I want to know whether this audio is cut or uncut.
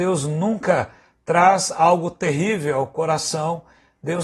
uncut